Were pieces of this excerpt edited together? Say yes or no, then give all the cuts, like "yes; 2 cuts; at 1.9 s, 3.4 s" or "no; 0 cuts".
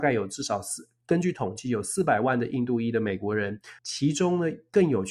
yes; 1 cut; at 3.8 s